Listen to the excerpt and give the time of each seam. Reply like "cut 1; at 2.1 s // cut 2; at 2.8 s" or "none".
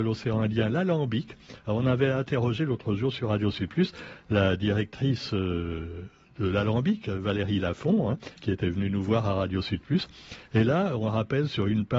none